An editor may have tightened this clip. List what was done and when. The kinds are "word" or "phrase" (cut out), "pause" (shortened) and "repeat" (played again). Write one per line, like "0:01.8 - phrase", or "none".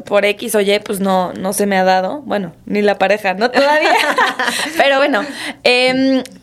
none